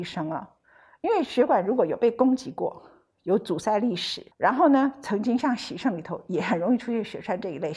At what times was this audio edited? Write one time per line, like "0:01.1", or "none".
0:04.3